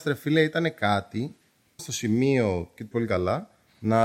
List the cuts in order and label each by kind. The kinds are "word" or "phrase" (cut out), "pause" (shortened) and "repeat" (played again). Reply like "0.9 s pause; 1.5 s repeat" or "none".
1.8 s word; 2.9 s word